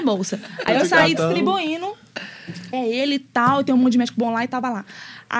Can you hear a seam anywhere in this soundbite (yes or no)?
yes